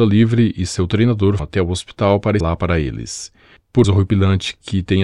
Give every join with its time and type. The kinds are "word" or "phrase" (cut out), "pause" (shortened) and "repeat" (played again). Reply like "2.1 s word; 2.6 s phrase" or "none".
1.4 s word; 2.4 s word; 3.8 s word